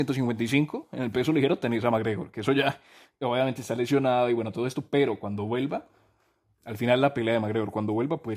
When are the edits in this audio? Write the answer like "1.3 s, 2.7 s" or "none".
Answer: none